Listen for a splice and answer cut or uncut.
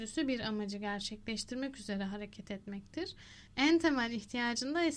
uncut